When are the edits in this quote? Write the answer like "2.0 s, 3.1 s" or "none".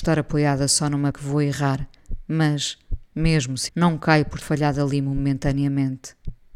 1.1 s, 3.7 s, 4.4 s